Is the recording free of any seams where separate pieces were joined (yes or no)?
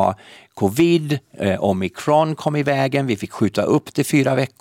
yes